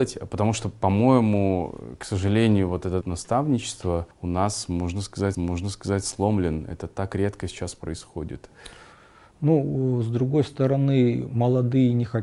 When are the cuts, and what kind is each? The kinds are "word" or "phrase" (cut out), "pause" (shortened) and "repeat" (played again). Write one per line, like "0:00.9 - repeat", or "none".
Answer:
0:03.0 - word
0:04.1 - pause
0:05.3 - repeat